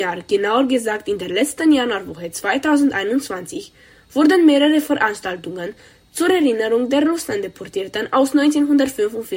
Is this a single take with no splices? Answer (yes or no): yes